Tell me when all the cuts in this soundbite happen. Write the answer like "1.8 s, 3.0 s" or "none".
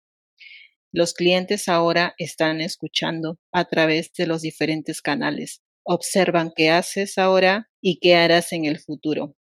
3.4 s, 5.7 s, 7.7 s